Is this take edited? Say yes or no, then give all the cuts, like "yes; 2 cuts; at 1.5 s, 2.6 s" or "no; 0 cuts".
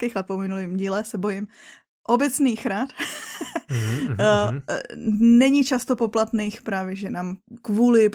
no; 0 cuts